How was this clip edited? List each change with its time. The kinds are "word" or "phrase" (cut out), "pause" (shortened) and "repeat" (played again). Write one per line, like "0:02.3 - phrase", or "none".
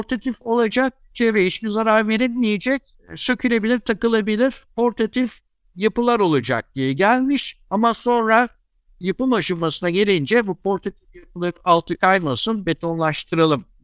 none